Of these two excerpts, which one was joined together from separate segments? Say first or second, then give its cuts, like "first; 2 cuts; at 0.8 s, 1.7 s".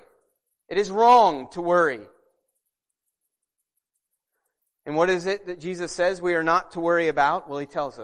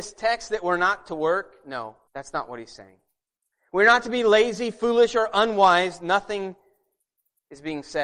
second; 1 cut; at 2.1 s